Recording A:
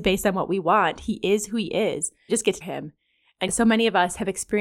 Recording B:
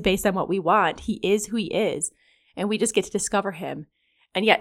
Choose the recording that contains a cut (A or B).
A